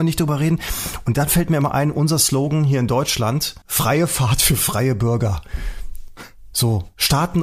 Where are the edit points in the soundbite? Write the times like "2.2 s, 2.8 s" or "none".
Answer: 3.6 s